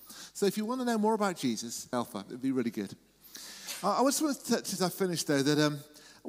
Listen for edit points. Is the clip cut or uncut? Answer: cut